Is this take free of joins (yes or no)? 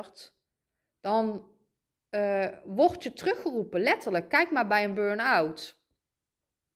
yes